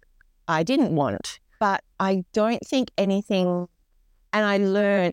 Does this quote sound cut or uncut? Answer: cut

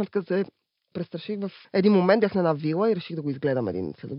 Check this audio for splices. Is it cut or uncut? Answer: cut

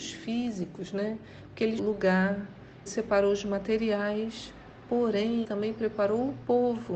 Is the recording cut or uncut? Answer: cut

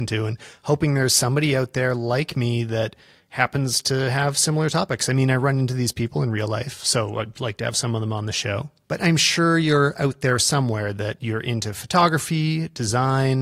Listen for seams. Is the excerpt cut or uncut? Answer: uncut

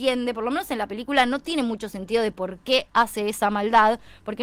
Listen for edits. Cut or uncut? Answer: uncut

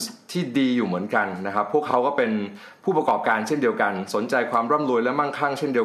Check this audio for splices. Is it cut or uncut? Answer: uncut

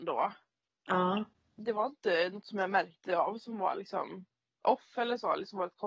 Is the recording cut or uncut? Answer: uncut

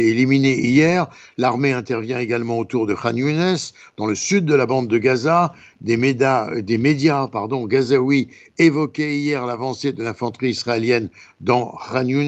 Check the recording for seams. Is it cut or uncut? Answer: uncut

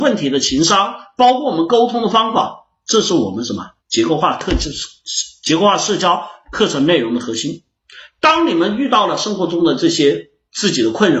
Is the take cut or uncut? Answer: cut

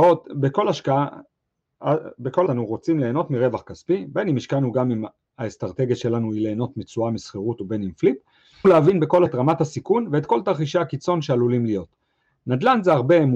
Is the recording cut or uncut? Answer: cut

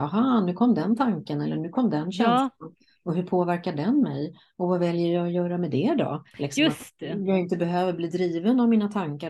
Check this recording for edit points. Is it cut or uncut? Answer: cut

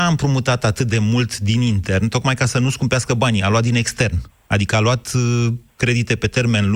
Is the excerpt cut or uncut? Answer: uncut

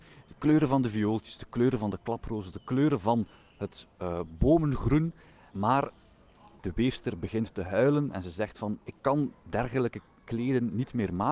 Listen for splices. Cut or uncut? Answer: uncut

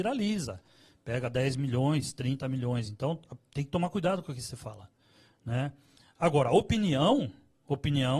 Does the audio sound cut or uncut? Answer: uncut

